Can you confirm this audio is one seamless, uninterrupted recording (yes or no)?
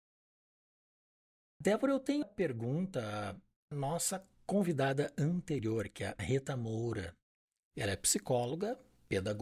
no